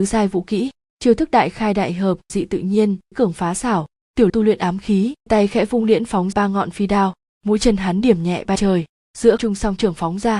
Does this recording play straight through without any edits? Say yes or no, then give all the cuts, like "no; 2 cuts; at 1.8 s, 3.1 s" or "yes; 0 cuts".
no; 7 cuts; at 2.3 s, 3.1 s, 4.3 s, 5.3 s, 6.3 s, 8.6 s, 9.4 s